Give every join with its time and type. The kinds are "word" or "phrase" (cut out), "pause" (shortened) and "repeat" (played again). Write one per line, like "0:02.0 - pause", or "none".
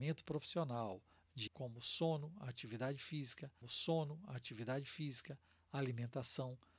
0:01.5 - word
0:03.6 - repeat